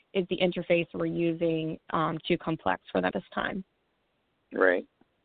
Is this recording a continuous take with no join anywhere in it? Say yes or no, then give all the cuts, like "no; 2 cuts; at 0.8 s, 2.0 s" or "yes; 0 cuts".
no; 2 cuts; at 2.2 s, 3.1 s